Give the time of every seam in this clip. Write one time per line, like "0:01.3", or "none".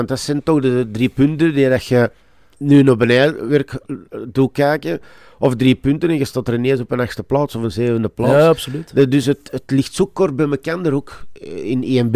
none